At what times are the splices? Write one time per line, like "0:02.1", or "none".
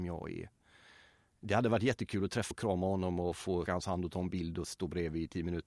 0:02.5
0:03.7